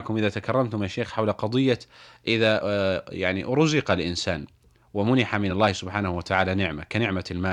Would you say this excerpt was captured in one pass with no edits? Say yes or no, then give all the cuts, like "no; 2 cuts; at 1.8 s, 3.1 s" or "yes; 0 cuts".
yes; 0 cuts